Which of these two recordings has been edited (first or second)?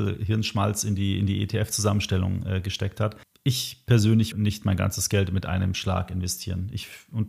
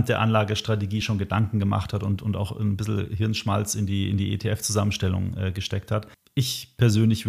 first